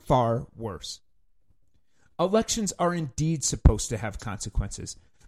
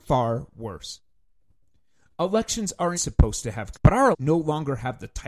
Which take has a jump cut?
second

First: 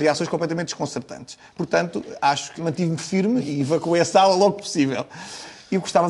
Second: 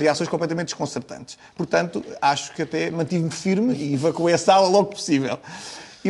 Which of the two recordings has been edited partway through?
first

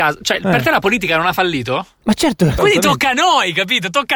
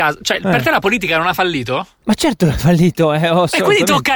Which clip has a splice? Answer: first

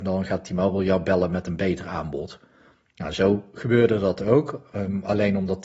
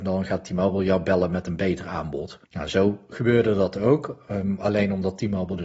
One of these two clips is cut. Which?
second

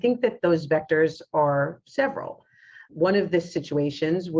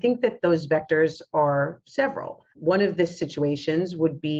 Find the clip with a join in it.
second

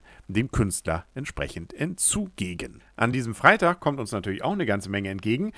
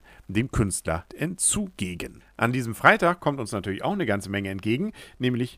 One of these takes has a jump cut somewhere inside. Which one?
second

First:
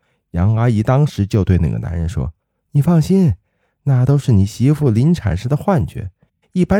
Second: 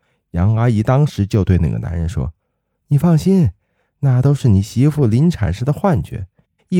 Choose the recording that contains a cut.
first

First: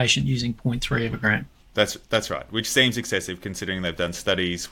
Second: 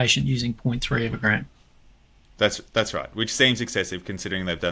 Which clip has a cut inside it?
first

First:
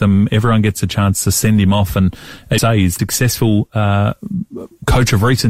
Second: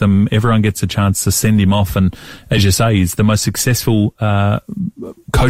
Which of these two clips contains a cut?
first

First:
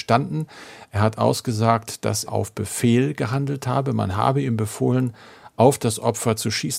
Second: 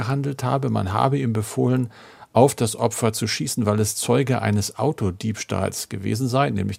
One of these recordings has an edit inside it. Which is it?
first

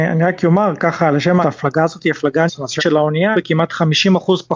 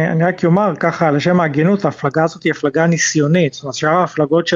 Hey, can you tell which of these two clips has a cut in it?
first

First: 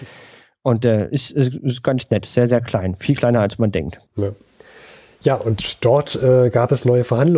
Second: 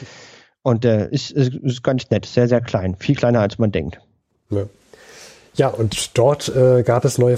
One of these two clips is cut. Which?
first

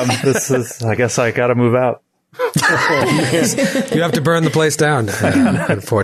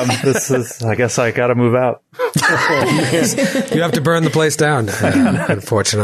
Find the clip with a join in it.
second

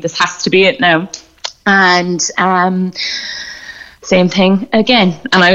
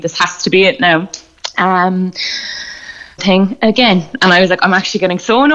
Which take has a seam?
second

